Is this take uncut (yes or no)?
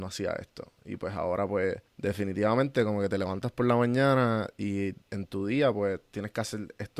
no